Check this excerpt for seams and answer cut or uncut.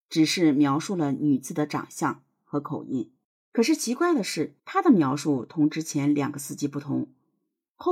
cut